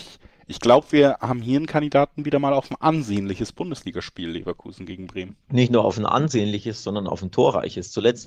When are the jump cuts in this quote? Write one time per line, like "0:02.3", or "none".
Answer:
0:05.4